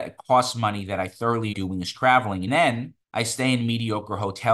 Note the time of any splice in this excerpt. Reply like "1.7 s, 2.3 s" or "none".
1.5 s, 2.5 s, 3.0 s